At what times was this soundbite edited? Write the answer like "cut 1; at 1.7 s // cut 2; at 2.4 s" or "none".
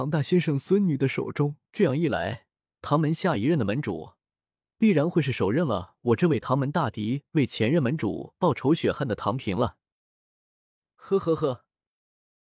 cut 1; at 1.7 s